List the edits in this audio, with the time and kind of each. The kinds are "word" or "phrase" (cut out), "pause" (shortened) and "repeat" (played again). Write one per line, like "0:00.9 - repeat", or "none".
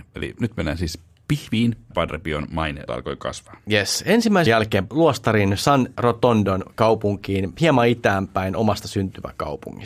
0:01.9 - phrase
0:02.9 - word
0:04.5 - word
0:04.9 - phrase
0:06.0 - word